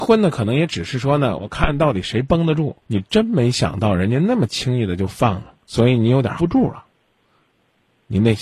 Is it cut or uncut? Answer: cut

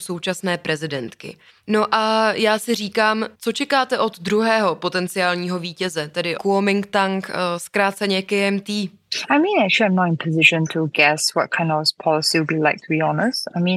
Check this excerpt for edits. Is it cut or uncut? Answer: cut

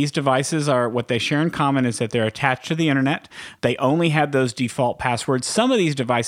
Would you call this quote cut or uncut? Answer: uncut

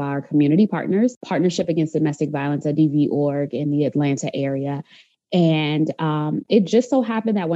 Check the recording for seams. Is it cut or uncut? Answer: uncut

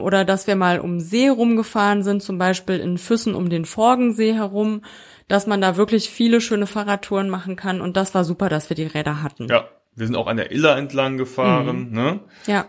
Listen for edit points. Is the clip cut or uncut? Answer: uncut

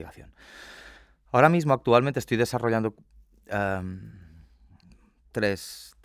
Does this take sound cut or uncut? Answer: uncut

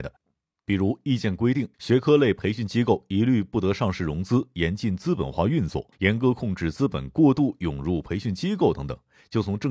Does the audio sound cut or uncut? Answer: cut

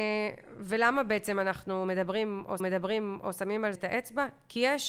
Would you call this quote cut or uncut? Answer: cut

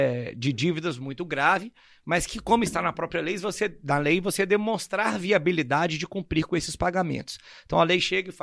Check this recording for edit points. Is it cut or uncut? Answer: uncut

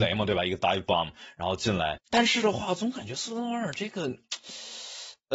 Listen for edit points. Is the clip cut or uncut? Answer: cut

